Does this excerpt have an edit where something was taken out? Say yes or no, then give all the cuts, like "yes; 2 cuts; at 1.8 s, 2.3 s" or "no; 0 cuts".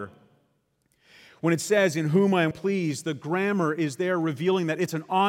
yes; 1 cut; at 2.5 s